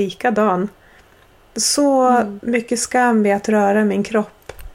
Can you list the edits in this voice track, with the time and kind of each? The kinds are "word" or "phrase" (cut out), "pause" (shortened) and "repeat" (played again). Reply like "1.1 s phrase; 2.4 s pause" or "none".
none